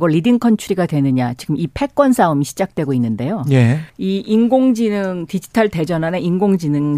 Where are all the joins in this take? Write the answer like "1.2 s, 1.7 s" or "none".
3.9 s